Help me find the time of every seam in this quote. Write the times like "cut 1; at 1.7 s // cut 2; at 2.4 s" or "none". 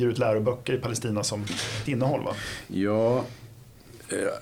cut 1; at 1.9 s